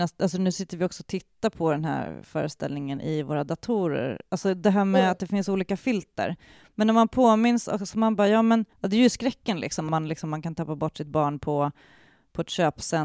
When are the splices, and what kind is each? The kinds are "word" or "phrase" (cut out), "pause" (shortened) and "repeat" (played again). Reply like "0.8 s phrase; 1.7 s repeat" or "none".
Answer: 8.7 s pause